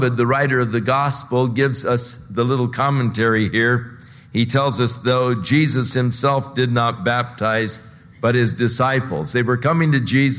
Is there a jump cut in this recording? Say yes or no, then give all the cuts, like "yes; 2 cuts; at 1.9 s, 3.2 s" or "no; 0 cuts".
no; 0 cuts